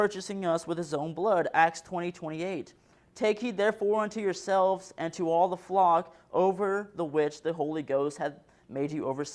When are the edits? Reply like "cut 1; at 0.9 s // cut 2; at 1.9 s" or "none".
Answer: none